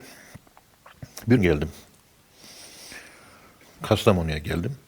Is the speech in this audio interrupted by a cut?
yes; 1 cut; at 1.4 s

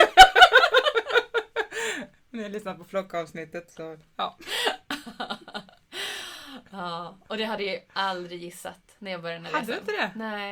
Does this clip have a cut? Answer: no; 0 cuts

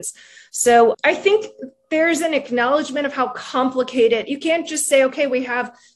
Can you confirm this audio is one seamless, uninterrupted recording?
no; 1 cut; at 0.9 s

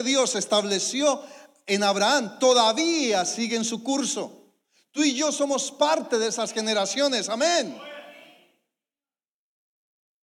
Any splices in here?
no; 0 cuts

